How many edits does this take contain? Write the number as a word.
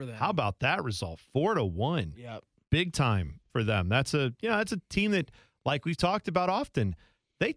zero